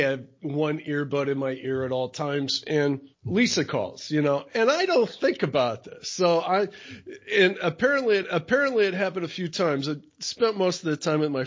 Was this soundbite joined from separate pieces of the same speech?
yes; 2 cuts; at 3.1 s, 8.2 s

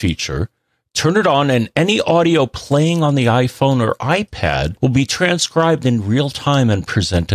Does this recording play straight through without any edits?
no; 1 cut; at 4.8 s

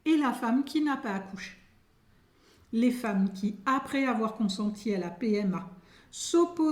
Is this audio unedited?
yes; 0 cuts

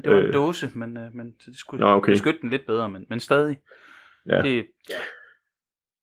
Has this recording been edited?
no; 0 cuts

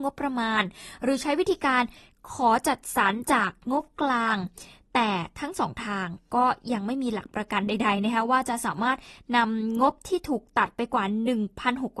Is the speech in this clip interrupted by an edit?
no; 0 cuts

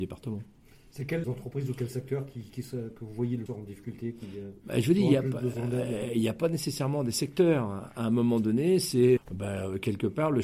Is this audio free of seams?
no; 3 cuts; at 1.2 s, 3.5 s, 9.2 s

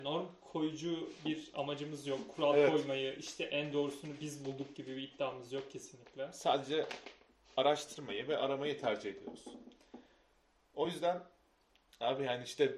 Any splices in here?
no; 0 cuts

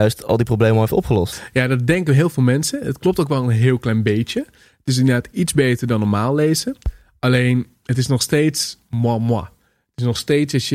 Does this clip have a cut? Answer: no; 0 cuts

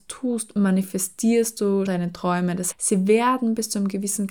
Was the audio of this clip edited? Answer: yes; 2 cuts; at 1.9 s, 2.7 s

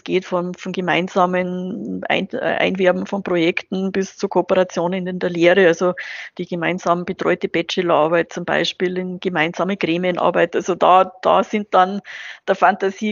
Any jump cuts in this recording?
no; 0 cuts

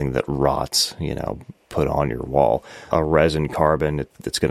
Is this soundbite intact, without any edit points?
no; 1 cut; at 2.9 s

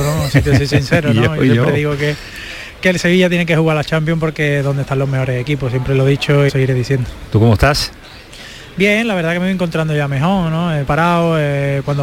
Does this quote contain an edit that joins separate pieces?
yes; 2 cuts; at 6.5 s, 10.9 s

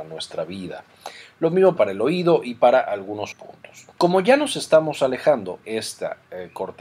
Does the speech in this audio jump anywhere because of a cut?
yes; 4 cuts; at 1.8 s, 3.3 s, 3.9 s, 5.6 s

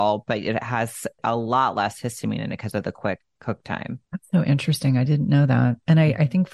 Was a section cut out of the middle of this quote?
yes; 1 cut; at 4.0 s

